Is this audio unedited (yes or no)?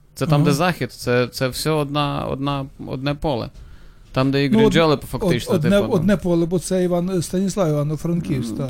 yes